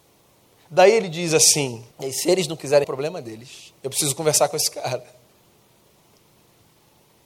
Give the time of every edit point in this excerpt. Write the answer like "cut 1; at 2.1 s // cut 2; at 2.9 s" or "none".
cut 1; at 1.9 s // cut 2; at 2.8 s // cut 3; at 3.8 s